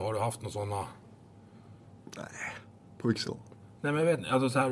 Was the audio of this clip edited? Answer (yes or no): yes